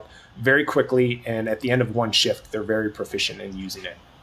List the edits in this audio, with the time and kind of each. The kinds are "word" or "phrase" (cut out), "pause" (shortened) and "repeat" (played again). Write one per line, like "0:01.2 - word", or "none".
none